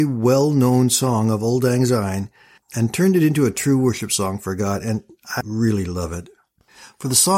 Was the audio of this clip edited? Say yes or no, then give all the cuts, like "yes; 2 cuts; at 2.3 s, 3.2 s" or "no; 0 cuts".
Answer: yes; 1 cut; at 5.4 s